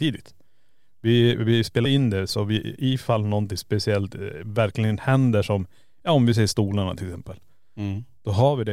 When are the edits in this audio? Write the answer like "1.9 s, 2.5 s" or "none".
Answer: 1.8 s